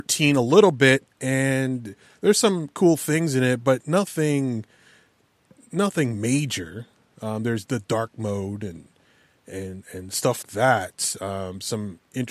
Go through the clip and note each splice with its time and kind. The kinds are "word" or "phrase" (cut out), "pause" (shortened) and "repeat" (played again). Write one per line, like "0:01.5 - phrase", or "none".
0:10.4 - word

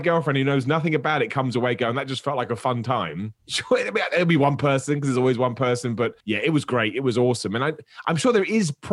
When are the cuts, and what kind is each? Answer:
0:03.4 - pause
0:06.2 - pause

